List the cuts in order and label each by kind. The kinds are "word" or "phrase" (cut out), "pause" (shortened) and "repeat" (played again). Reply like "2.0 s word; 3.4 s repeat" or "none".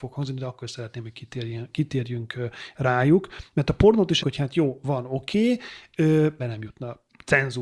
4.2 s word; 6.4 s word